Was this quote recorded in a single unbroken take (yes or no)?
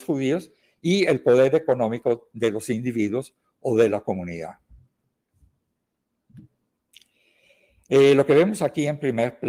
yes